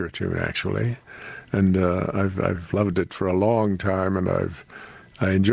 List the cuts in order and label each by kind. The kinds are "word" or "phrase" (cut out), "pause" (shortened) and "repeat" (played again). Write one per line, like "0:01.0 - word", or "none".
none